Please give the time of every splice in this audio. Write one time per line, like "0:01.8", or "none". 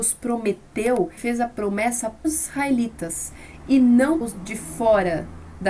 0:01.2
0:02.2
0:04.2